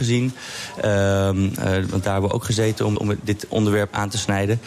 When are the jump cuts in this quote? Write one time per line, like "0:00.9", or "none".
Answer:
0:03.0